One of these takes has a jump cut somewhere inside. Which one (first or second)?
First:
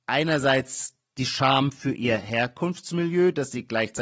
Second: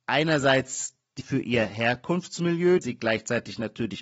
second